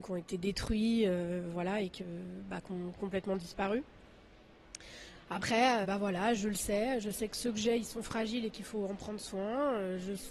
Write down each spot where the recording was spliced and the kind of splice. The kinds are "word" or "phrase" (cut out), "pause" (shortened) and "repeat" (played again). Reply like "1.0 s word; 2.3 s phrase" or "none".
5.8 s word

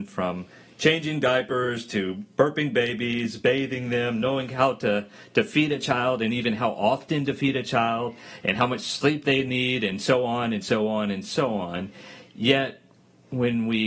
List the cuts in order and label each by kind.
none

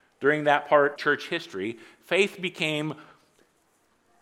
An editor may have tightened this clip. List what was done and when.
1.0 s word

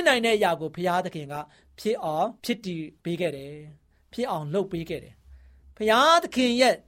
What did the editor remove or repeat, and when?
2.4 s pause; 3.0 s pause

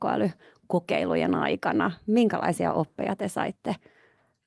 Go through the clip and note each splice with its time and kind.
none

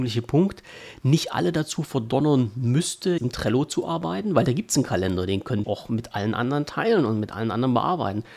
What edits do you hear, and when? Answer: 3.2 s word; 5.6 s word

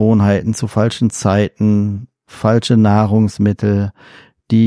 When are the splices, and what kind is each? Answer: none

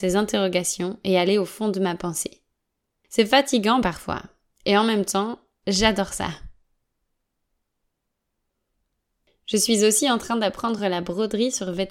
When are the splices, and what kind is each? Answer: none

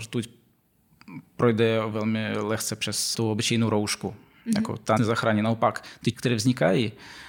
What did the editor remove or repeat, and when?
1.9 s word; 3.1 s word; 5.0 s word; 6.1 s word

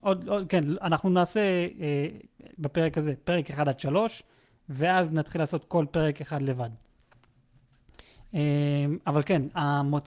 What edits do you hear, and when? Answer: none

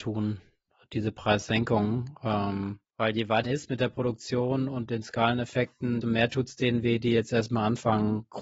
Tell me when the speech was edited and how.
2.9 s pause; 3.4 s word; 6.0 s word

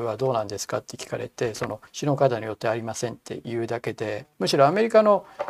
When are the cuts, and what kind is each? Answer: 1.9 s pause; 4.3 s pause

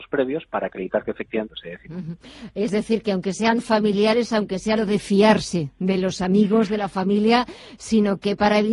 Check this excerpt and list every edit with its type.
1.5 s phrase; 4.8 s phrase

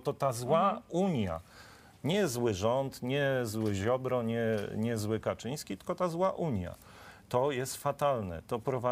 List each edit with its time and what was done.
none

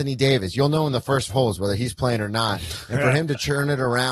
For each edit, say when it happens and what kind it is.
1.3 s word

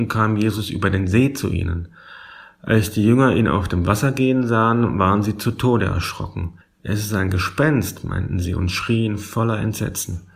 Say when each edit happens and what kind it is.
6.6 s pause

